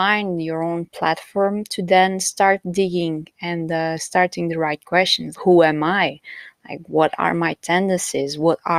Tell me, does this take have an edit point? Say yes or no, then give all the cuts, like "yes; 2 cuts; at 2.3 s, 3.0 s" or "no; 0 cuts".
yes; 1 cut; at 5.4 s